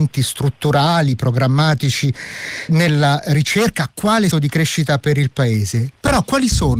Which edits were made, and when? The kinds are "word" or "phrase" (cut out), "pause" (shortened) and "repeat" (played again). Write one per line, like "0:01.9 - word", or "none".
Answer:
0:02.7 - word
0:04.3 - word